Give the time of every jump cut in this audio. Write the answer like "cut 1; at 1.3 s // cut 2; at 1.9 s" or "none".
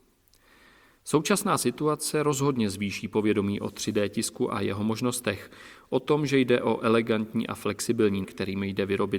cut 1; at 8.2 s